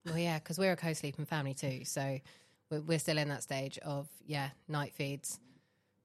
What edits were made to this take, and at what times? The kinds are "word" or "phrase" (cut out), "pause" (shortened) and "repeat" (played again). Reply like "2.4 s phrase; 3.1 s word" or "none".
none